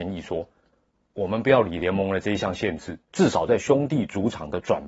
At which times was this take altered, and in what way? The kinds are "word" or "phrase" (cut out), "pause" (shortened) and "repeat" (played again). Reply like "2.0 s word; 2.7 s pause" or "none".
3.0 s pause